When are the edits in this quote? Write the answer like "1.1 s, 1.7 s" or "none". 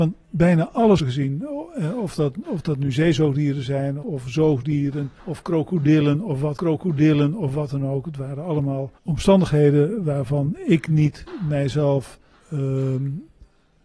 1.0 s, 4.0 s, 5.2 s, 6.6 s, 9.0 s, 12.3 s